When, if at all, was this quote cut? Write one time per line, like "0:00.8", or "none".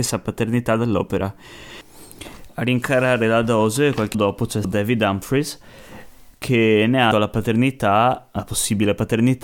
0:04.1
0:04.6
0:07.1